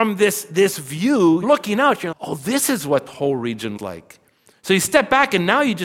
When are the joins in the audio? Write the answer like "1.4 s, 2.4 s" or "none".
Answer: 1.4 s, 2.1 s, 3.1 s, 3.8 s